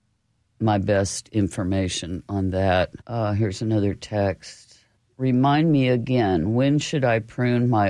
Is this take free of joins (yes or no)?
no